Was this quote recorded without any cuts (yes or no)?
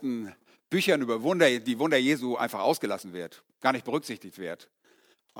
yes